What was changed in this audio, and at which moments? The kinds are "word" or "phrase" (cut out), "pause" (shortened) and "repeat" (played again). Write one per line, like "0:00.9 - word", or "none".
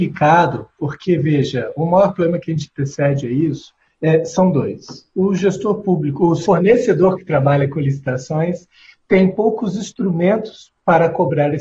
none

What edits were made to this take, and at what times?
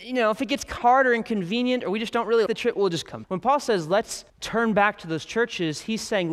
0:02.5 - word
0:03.2 - word
0:04.3 - pause

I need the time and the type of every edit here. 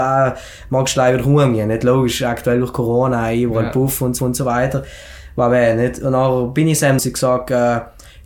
0:04.2 - repeat
0:07.0 - phrase

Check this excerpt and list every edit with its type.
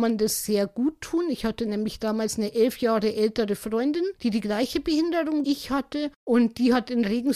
0:04.2 - pause
0:05.4 - word

